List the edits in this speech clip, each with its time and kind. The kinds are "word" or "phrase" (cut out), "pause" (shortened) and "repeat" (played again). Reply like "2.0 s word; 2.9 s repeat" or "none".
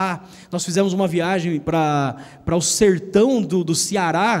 none